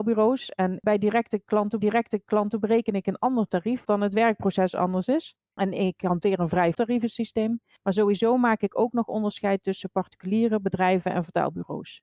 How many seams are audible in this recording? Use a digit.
3